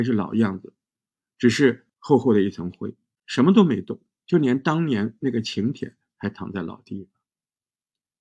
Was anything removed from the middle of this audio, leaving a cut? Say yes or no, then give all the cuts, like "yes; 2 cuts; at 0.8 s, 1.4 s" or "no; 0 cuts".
no; 0 cuts